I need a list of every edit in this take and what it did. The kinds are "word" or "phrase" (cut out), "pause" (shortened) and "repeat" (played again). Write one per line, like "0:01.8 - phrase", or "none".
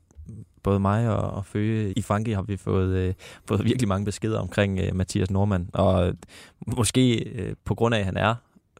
0:01.9 - word